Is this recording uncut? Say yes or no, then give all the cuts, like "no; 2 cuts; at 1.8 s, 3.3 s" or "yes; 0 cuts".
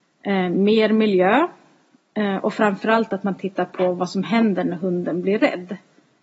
yes; 0 cuts